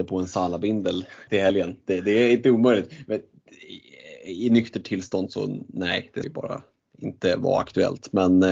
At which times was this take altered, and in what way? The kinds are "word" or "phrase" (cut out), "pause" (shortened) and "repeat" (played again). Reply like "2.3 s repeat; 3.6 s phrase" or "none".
1.3 s word; 6.2 s word